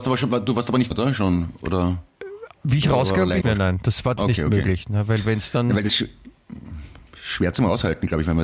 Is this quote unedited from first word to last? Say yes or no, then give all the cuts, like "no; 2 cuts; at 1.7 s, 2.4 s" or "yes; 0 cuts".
no; 5 cuts; at 0.9 s, 2.5 s, 3.4 s, 4.2 s, 5.9 s